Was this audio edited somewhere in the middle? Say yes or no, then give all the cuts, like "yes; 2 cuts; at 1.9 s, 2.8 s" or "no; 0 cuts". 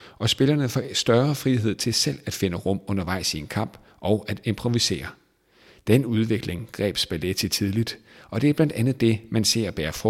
no; 0 cuts